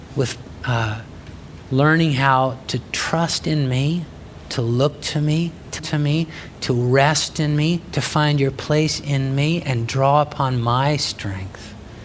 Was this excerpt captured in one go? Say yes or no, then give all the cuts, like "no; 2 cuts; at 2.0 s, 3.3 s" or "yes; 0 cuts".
no; 1 cut; at 5.8 s